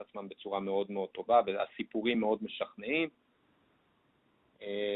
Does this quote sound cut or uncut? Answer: uncut